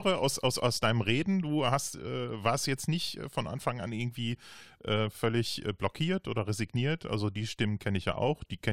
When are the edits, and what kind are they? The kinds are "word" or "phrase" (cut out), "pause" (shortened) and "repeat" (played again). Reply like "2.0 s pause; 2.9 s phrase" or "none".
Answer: none

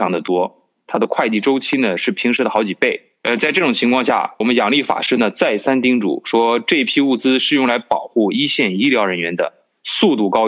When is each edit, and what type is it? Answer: 4.4 s word

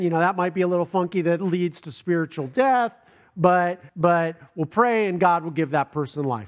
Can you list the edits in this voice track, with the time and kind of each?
3.9 s pause

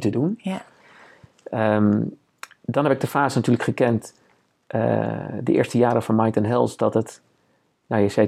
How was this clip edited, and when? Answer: none

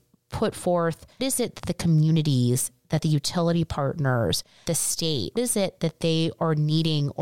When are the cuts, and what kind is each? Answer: 1.2 s word; 4.7 s word; 5.4 s word

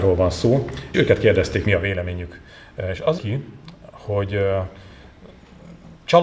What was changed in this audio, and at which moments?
0.9 s word; 1.7 s phrase; 3.2 s word

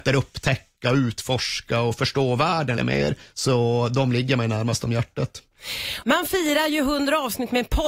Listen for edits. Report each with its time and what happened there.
2.8 s word

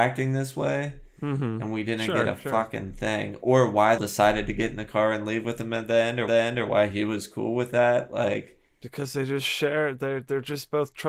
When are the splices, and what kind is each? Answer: 4.0 s phrase; 6.3 s repeat

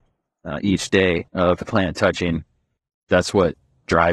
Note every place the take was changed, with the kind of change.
1.3 s pause

